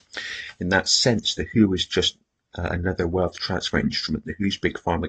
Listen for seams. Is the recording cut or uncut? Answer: uncut